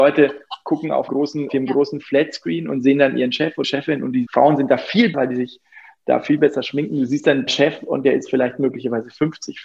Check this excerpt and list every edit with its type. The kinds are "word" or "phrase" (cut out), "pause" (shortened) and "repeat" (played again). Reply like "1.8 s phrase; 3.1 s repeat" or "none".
1.1 s word; 1.5 s word; 3.6 s word; 4.3 s word; 5.1 s word; 7.5 s word